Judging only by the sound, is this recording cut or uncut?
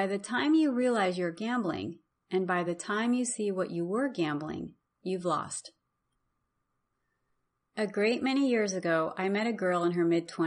uncut